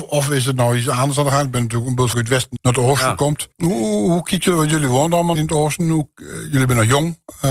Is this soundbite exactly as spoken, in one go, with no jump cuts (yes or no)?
no